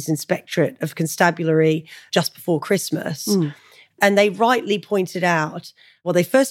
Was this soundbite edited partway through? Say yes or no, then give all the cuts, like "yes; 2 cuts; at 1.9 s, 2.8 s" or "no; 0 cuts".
no; 0 cuts